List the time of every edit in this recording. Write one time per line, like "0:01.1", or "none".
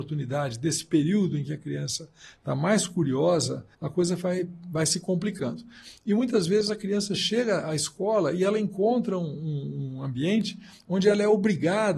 0:03.7

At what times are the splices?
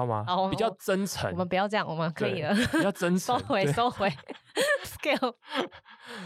0:04.8

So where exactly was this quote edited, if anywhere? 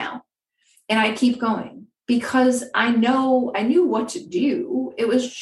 0:02.0

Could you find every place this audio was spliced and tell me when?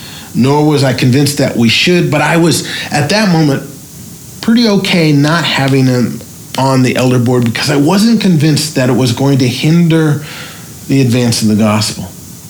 none

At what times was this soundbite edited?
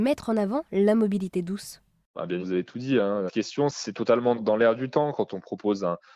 0:02.4
0:03.3

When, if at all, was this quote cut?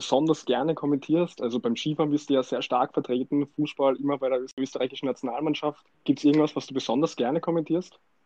0:05.9

